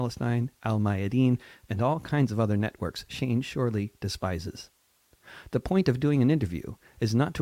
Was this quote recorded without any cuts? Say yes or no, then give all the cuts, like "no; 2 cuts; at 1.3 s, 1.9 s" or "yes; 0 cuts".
yes; 0 cuts